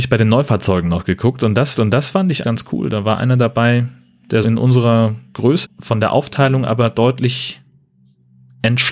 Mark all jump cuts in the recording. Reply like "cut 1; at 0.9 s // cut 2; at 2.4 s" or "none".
cut 1; at 1.7 s // cut 2; at 2.4 s // cut 3; at 4.4 s // cut 4; at 5.6 s